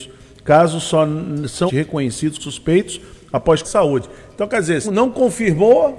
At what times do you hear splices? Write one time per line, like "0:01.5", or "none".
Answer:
0:01.7
0:02.4
0:03.6
0:04.8